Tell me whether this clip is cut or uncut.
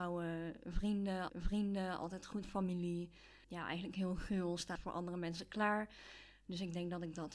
cut